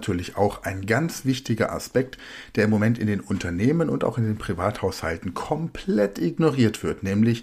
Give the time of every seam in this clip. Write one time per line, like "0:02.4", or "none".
none